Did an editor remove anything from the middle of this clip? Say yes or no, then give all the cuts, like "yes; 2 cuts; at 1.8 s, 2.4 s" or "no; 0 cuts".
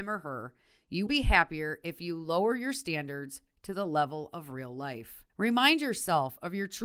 yes; 2 cuts; at 1.1 s, 5.3 s